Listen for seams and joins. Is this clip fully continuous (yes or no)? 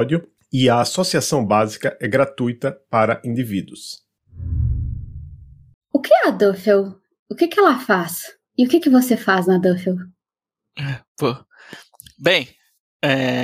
yes